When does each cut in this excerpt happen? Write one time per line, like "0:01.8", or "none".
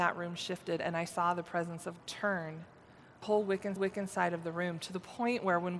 0:02.0
0:03.2
0:03.8